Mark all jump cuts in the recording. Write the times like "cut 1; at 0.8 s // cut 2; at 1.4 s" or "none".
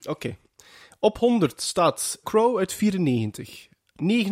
cut 1; at 2.2 s